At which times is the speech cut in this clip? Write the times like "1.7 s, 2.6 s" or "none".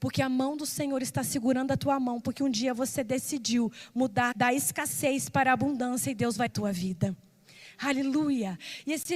4.3 s, 6.5 s